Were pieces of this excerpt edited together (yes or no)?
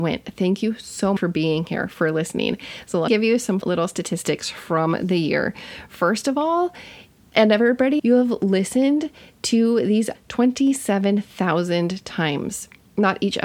yes